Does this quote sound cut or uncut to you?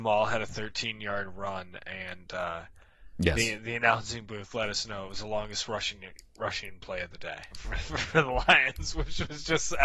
cut